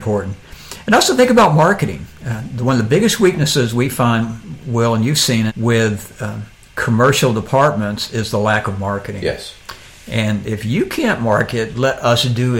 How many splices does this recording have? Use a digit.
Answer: 1